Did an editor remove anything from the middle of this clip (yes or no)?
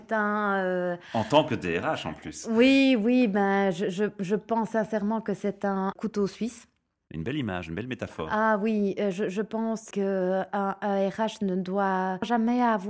no